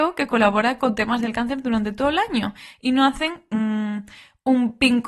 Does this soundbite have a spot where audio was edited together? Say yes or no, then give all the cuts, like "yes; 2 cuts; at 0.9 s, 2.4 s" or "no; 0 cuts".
no; 0 cuts